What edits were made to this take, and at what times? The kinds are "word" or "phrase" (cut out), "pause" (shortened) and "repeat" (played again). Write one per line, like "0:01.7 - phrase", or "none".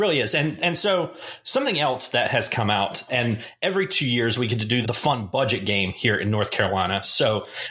0:03.1 - word
0:04.8 - word